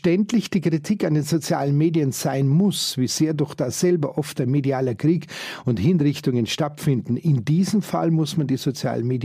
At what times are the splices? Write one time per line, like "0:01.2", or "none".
none